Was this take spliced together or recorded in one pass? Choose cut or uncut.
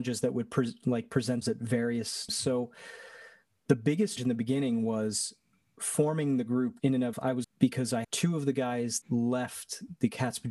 cut